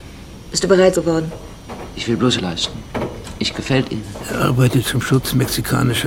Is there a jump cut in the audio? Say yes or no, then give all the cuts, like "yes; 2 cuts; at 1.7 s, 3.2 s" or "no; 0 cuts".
yes; 4 cuts; at 0.9 s, 2.4 s, 3.5 s, 4.8 s